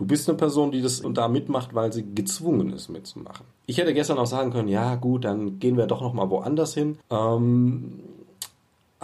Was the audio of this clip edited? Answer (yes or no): yes